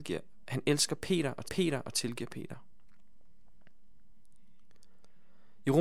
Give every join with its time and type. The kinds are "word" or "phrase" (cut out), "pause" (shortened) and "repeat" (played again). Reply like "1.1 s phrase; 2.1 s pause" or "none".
1.4 s repeat